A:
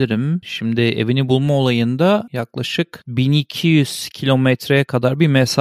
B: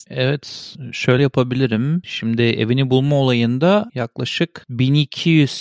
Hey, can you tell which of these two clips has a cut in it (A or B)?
B